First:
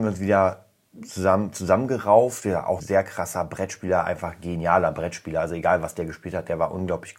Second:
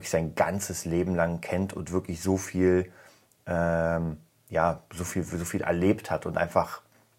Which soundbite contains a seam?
first; 1 cut; at 2.8 s

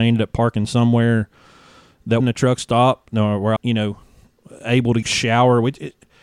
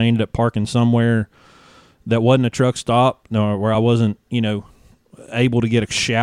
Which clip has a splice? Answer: first; 3 cuts; at 2.2 s, 3.6 s, 5.0 s

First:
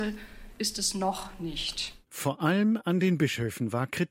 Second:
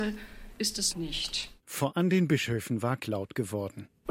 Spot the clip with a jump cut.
second; 3 cuts; at 0.9 s, 1.9 s, 3.0 s

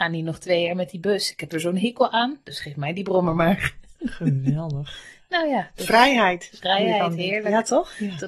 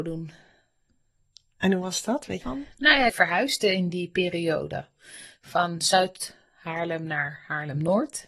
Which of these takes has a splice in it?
second; 2 cuts; at 2.4 s, 3.1 s

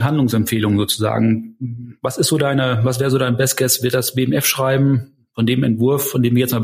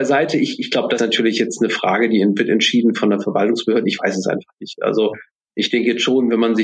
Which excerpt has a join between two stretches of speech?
second; 1 cut; at 1.0 s

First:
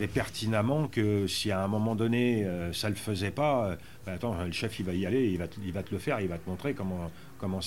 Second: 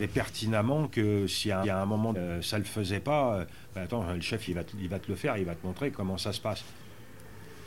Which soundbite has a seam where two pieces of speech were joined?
second; 4 cuts; at 1.6 s, 2.1 s, 4.5 s, 5.9 s

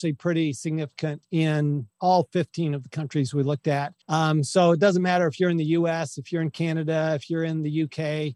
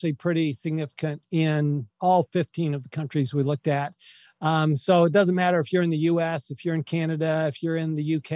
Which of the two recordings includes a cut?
first; 1 cut; at 4.0 s

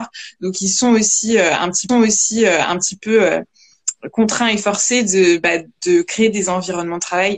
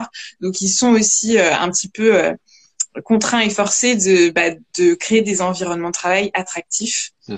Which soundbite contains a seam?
first; 1 cut; at 1.9 s

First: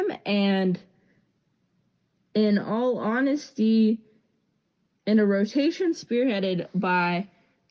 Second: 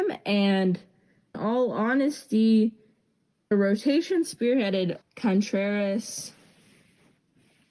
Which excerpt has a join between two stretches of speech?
second; 3 cuts; at 1.3 s, 3.5 s, 5.0 s

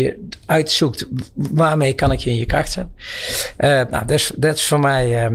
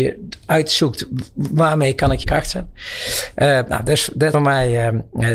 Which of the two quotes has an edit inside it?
second; 2 cuts; at 2.2 s, 4.3 s

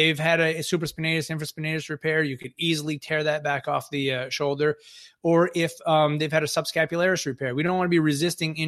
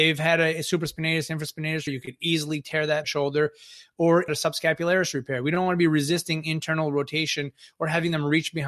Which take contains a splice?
second; 3 cuts; at 1.9 s, 3.0 s, 4.3 s

